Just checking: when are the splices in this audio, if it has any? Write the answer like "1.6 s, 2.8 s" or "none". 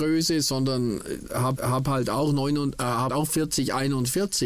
1.6 s, 3.1 s